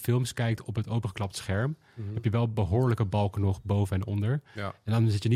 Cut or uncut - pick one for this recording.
uncut